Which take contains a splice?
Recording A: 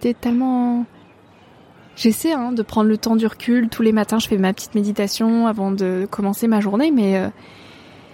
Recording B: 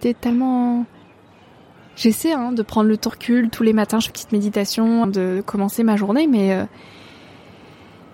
B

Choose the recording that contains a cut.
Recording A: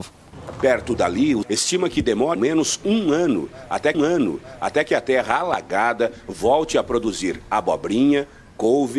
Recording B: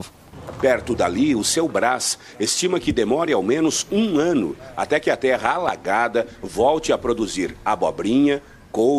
A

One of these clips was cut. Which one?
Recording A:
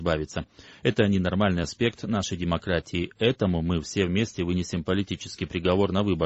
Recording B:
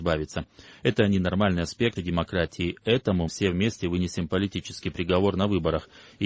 B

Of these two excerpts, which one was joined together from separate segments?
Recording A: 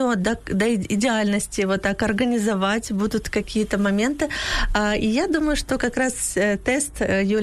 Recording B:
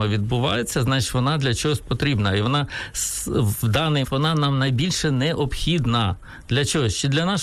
B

